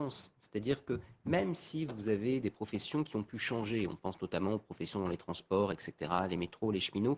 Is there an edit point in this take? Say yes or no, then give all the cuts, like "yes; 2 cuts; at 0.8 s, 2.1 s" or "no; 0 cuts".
no; 0 cuts